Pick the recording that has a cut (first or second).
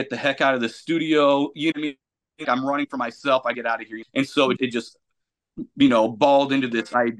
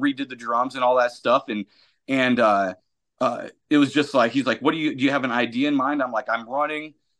first